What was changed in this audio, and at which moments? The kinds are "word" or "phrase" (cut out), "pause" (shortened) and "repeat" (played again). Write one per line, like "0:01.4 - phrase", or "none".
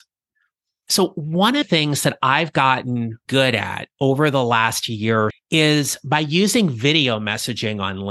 0:01.6 - word
0:03.3 - word
0:05.3 - word